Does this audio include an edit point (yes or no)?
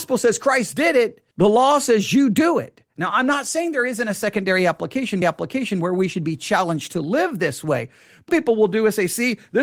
yes